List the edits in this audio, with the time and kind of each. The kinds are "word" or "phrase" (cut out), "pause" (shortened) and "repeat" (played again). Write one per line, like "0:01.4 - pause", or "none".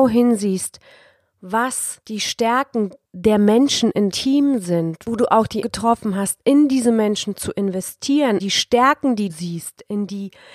0:04.1 - word
0:05.6 - word
0:08.4 - word
0:09.3 - word